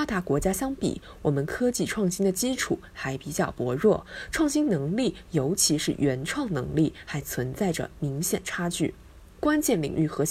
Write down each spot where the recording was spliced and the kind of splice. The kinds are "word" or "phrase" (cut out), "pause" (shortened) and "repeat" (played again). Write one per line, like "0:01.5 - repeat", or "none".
none